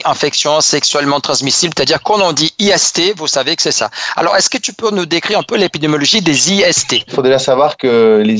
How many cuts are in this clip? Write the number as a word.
zero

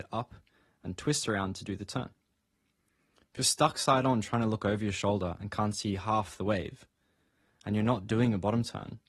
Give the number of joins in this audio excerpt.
zero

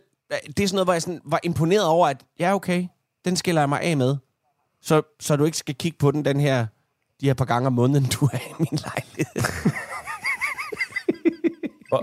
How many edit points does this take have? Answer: zero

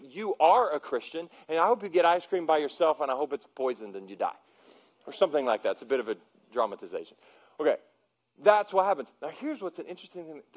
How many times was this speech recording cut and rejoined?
zero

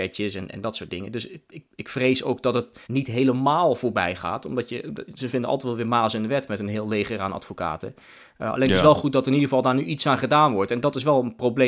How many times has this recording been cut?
one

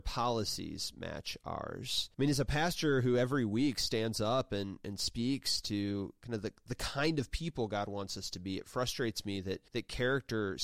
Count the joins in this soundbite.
two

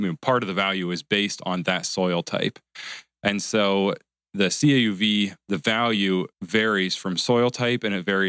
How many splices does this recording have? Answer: one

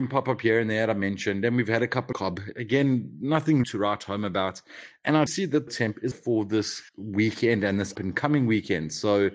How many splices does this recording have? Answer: seven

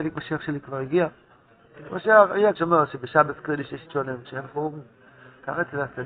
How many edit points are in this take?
three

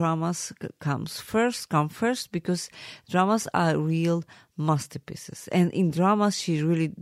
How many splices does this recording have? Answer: zero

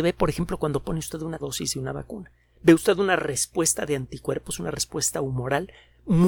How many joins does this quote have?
one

